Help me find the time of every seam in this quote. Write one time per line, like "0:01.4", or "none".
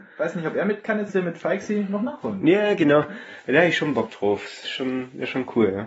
0:01.1